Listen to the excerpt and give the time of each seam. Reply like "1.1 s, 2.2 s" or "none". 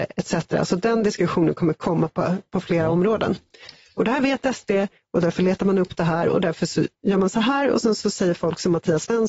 none

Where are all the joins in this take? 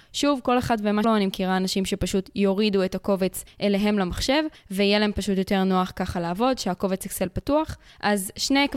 1.0 s

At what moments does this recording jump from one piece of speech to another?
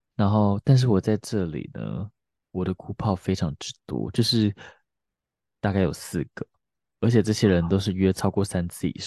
none

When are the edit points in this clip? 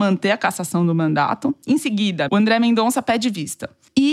2.3 s

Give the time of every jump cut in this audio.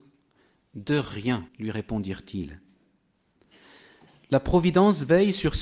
1.5 s

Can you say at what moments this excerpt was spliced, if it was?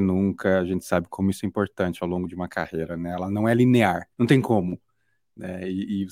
4.1 s

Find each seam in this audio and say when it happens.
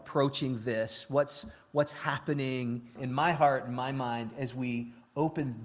3.0 s

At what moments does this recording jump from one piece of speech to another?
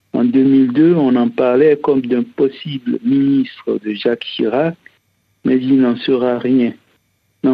none

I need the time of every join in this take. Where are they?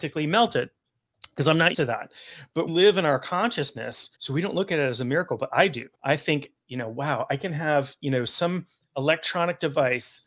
1.7 s, 2.7 s, 4.1 s, 5.9 s

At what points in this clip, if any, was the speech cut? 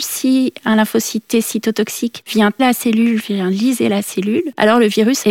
2.6 s

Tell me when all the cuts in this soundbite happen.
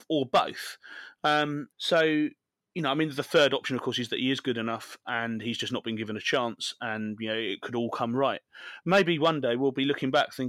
1.7 s

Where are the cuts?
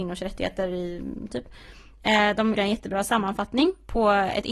1.3 s, 2.5 s

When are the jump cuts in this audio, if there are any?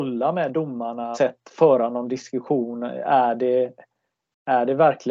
1.1 s

